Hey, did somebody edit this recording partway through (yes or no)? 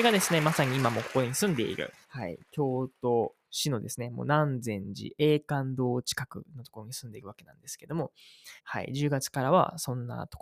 yes